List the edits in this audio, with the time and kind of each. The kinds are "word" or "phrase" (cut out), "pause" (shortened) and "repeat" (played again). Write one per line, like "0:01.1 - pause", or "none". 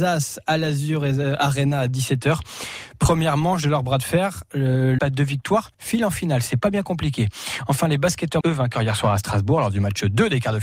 0:05.0 - phrase
0:05.7 - pause
0:08.4 - word